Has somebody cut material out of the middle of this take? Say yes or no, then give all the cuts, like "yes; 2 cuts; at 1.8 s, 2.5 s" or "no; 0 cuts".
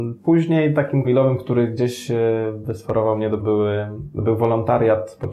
yes; 2 cuts; at 1.0 s, 3.4 s